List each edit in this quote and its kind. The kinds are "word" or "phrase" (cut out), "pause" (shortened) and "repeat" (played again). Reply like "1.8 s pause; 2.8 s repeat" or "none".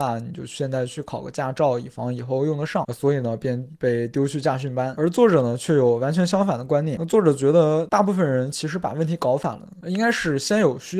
none